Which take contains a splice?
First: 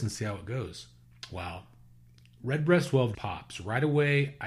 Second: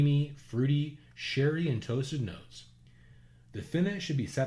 first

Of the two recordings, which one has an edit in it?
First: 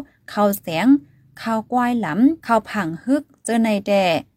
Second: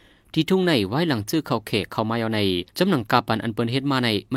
second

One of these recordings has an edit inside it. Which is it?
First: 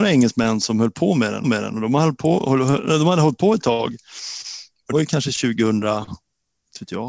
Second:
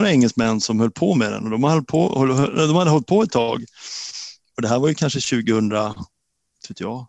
first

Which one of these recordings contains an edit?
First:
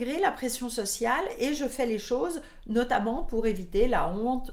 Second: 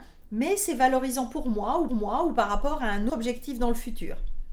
second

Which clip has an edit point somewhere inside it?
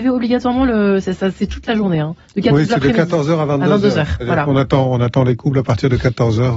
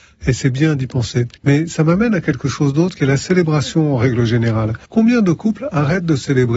second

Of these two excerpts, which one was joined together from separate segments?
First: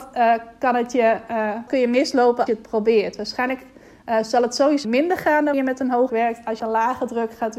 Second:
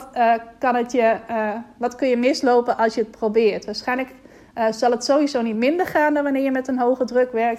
first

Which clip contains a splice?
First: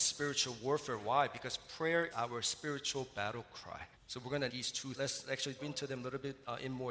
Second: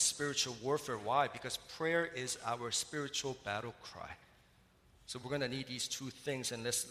first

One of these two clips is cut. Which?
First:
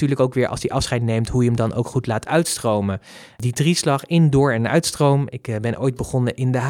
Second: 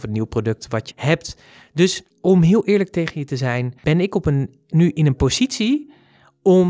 second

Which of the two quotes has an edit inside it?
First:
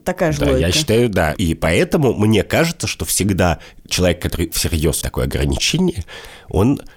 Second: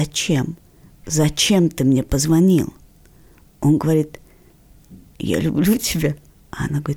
first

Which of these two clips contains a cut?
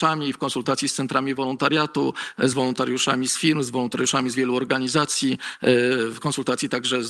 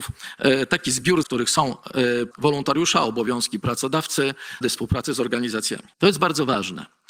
second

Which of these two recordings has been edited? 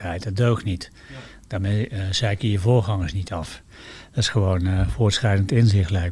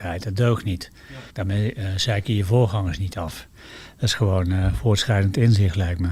second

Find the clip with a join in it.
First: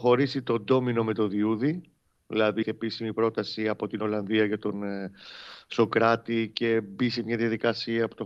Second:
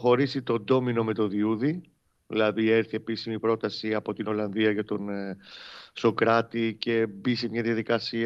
first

